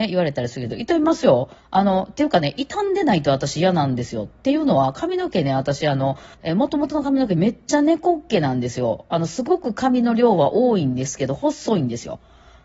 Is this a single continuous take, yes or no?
no